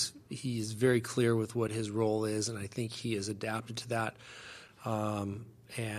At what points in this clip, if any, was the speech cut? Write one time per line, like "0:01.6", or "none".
none